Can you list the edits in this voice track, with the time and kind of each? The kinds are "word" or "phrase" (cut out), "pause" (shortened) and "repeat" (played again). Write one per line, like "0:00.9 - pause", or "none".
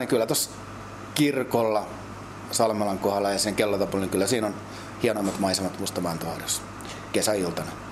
none